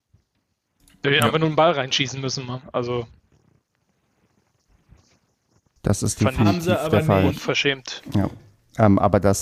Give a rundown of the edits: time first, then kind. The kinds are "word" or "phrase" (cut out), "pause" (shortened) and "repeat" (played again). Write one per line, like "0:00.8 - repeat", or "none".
none